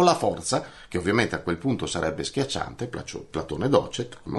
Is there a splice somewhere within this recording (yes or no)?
no